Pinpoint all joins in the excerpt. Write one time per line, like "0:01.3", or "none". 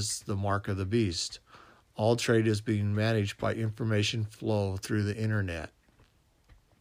none